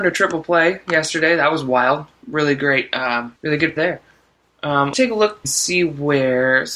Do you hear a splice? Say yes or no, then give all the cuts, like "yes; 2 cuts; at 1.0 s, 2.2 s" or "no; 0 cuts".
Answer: yes; 4 cuts; at 3.4 s, 3.8 s, 4.9 s, 5.4 s